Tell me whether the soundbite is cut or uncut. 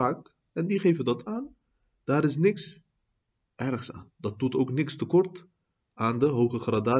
uncut